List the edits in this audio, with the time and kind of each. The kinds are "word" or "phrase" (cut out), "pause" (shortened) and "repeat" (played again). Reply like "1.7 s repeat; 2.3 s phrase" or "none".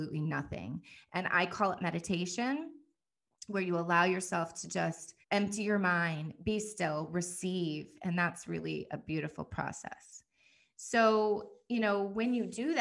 5.2 s pause